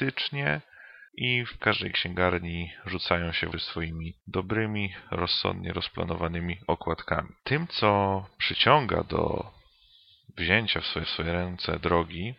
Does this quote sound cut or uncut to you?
cut